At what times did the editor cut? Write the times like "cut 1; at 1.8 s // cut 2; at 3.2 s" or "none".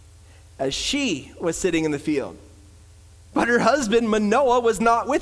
none